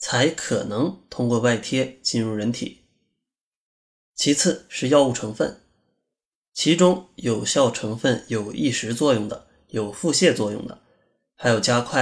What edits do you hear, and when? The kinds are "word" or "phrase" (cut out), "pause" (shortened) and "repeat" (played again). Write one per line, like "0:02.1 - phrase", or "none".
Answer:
none